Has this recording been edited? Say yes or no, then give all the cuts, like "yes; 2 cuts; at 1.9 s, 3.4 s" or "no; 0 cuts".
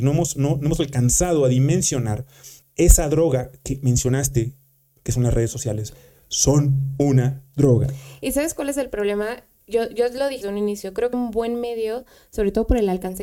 yes; 3 cuts; at 2.6 s, 10.4 s, 11.1 s